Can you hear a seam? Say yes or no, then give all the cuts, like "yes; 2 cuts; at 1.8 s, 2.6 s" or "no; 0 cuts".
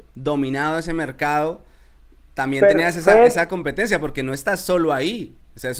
no; 0 cuts